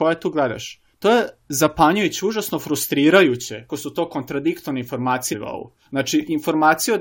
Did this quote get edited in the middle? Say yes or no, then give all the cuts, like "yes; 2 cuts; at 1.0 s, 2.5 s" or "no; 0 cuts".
yes; 4 cuts; at 0.9 s, 1.4 s, 3.7 s, 5.3 s